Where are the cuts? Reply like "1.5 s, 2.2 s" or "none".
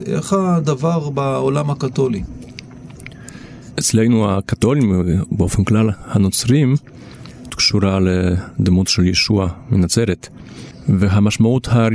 7.5 s